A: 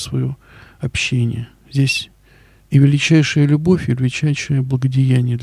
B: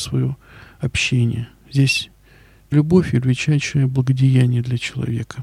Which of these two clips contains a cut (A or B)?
B